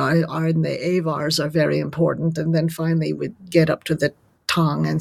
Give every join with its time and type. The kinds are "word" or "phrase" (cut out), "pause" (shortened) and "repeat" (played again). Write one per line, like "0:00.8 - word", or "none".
none